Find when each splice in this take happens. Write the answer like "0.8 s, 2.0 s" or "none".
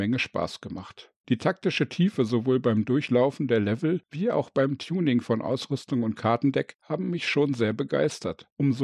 1.2 s